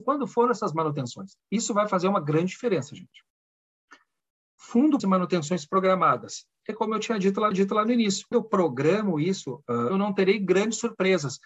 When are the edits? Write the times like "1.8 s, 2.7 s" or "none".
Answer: 1.4 s, 5.0 s, 7.5 s, 8.3 s, 9.9 s